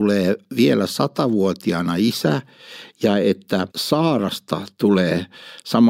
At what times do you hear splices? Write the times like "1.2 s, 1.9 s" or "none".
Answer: 3.7 s